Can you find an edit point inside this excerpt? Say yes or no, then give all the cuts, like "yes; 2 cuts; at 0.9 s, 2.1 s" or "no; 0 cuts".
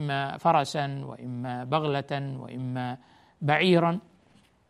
no; 0 cuts